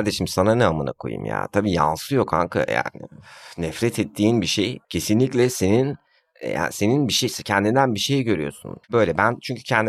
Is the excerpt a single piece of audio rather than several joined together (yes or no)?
no